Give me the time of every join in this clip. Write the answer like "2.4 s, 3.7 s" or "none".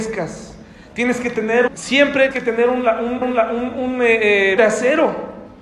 1.7 s, 2.3 s, 3.2 s, 4.6 s